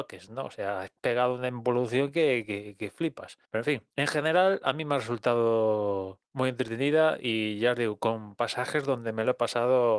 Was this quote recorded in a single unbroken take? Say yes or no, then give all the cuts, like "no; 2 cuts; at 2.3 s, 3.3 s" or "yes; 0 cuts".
no; 3 cuts; at 3.4 s, 3.9 s, 6.2 s